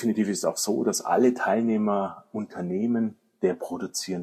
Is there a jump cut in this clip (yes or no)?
no